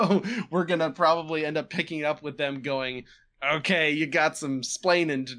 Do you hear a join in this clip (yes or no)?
no